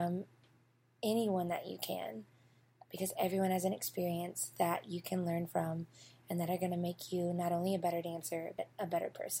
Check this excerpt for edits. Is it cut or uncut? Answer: uncut